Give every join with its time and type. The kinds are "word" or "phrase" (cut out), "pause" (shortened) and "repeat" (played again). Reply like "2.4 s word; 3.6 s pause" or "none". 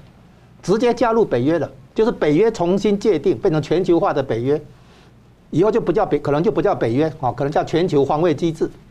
none